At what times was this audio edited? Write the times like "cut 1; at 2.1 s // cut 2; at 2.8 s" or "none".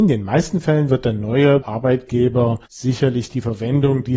cut 1; at 1.6 s // cut 2; at 2.7 s

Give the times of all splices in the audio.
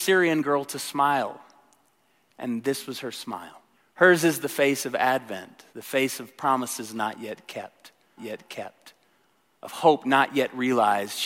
cut 1; at 3.7 s // cut 2; at 5.7 s // cut 3; at 8.2 s

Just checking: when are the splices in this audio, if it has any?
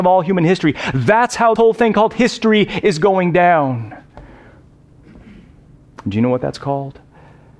cut 1; at 1.6 s

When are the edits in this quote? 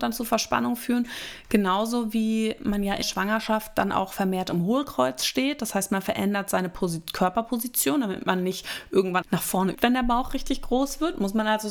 cut 1; at 3.0 s // cut 2; at 9.2 s // cut 3; at 9.7 s

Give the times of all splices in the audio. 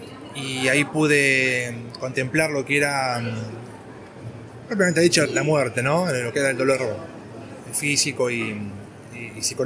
cut 1; at 5.3 s

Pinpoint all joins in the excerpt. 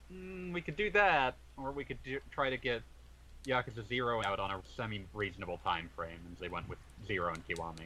cut 1; at 4.2 s // cut 2; at 4.6 s // cut 3; at 6.4 s

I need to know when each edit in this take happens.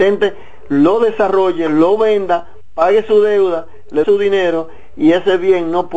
cut 1; at 4.0 s

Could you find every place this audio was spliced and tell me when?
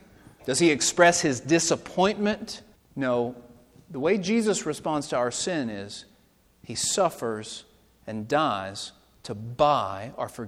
cut 1; at 2.8 s

